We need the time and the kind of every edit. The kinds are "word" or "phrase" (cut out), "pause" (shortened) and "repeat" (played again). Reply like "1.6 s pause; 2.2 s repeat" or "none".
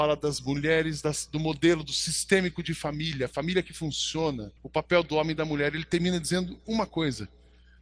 4.6 s pause